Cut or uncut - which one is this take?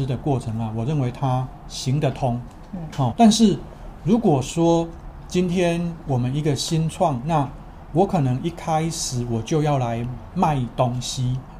cut